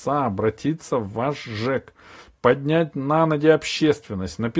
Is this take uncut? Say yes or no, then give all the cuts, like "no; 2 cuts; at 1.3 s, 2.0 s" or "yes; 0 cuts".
yes; 0 cuts